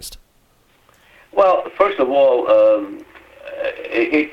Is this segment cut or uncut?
uncut